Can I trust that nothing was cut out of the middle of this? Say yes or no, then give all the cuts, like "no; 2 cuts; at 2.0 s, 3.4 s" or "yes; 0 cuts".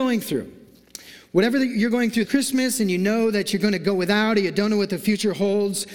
no; 1 cut; at 2.2 s